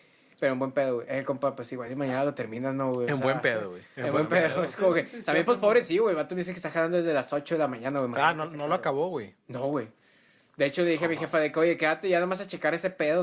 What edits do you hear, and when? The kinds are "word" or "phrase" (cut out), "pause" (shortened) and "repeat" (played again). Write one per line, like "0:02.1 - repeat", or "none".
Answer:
none